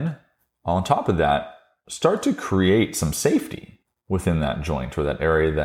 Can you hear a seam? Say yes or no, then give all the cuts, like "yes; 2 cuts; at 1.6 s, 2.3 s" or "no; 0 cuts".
no; 0 cuts